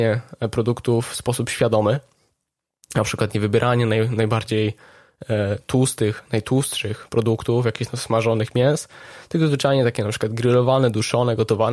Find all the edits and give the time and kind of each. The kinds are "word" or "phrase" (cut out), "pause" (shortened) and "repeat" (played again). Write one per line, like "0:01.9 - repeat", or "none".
none